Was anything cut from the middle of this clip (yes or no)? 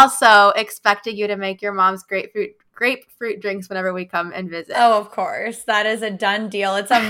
no